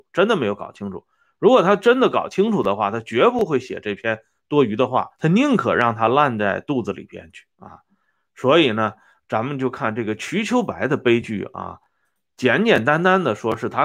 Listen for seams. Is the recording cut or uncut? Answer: cut